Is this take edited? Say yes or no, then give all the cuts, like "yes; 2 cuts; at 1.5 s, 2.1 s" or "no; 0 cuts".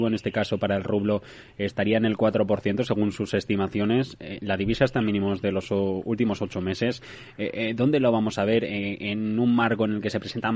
no; 0 cuts